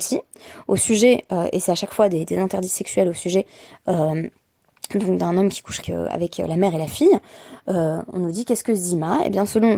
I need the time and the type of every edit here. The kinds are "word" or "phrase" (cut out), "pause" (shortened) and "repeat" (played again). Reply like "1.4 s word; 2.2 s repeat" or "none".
5.8 s word